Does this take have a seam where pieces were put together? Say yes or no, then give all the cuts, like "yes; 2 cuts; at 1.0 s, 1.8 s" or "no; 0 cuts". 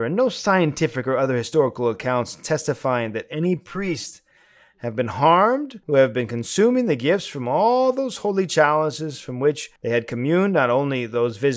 yes; 2 cuts; at 5.8 s, 9.8 s